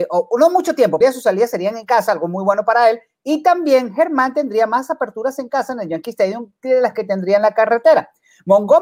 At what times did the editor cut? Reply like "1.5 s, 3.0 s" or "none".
1.0 s